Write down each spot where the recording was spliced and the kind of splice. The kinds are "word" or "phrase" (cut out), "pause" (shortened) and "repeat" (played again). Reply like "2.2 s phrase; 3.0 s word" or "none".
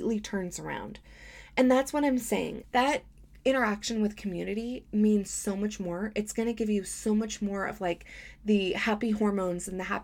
2.6 s word